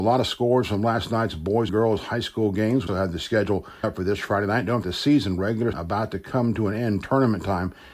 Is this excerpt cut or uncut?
cut